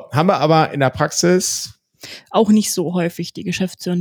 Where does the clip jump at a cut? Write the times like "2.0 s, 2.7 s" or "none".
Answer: none